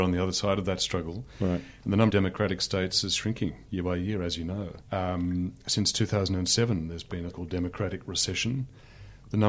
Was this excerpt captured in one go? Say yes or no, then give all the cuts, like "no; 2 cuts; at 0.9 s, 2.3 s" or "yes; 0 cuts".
no; 3 cuts; at 2.1 s, 4.8 s, 7.3 s